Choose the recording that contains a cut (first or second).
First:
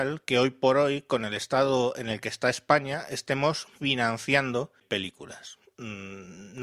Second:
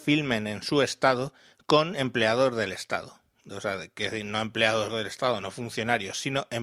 first